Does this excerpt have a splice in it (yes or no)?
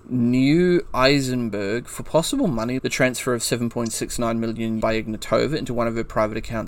yes